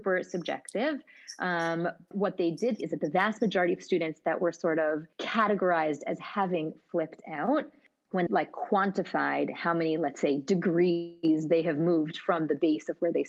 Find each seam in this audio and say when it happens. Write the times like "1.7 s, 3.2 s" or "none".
2.1 s, 2.8 s, 5.1 s, 8.3 s